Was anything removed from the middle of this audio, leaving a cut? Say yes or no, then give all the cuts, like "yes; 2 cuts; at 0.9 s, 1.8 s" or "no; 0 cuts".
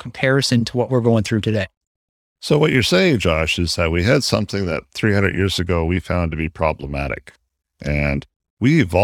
no; 0 cuts